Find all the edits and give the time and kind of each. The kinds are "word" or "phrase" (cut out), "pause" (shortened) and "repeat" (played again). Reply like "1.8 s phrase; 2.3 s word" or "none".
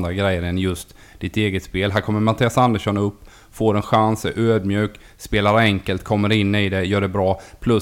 none